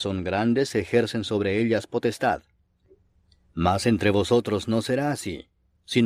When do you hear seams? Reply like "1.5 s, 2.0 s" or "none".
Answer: none